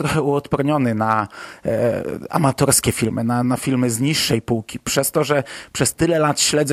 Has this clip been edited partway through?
yes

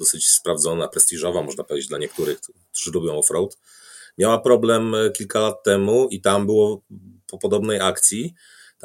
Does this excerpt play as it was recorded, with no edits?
yes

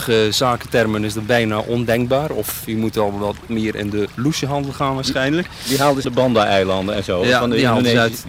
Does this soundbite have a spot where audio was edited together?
yes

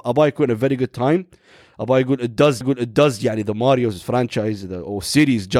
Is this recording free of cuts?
no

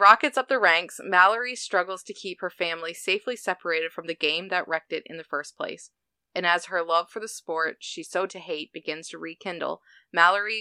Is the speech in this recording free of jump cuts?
no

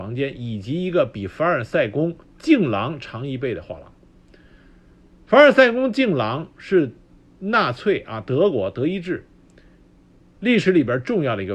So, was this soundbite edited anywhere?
no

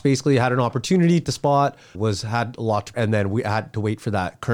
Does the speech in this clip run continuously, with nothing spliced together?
no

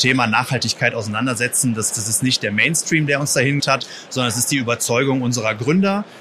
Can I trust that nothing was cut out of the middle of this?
no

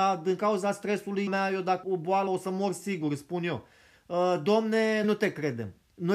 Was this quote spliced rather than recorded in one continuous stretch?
yes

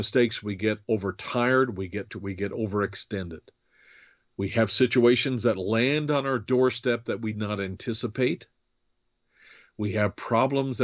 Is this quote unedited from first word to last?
no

